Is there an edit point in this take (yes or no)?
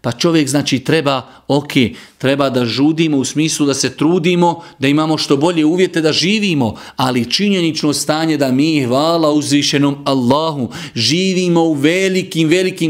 no